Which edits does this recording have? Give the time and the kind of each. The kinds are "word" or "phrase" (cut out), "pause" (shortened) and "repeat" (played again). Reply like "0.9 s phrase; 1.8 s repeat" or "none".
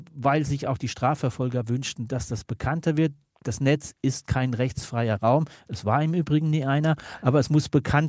none